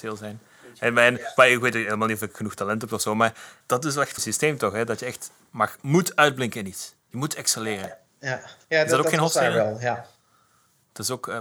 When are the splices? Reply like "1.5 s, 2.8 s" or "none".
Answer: 3.6 s, 4.2 s